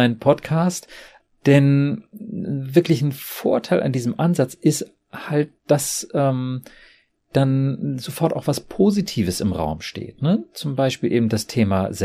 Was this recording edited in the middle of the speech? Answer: no; 0 cuts

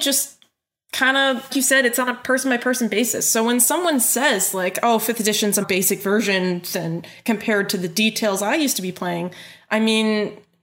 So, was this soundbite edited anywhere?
yes; 2 cuts; at 1.5 s, 5.6 s

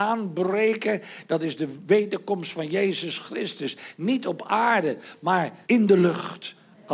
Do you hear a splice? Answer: yes; 1 cut; at 5.6 s

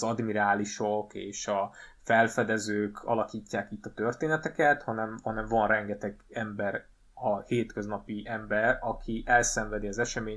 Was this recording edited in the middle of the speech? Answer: no; 0 cuts

